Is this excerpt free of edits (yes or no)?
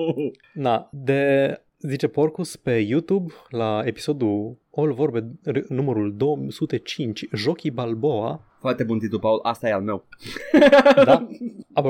yes